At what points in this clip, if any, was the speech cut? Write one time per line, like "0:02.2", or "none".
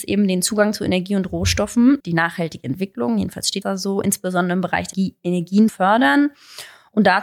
0:02.0
0:03.6
0:04.9
0:05.7